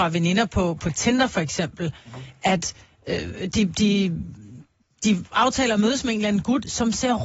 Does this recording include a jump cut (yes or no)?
no